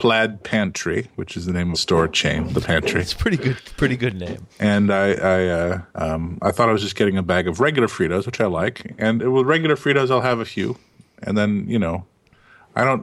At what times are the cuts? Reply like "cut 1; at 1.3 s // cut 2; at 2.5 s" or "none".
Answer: cut 1; at 1.7 s // cut 2; at 2.6 s // cut 3; at 4.5 s // cut 4; at 5.9 s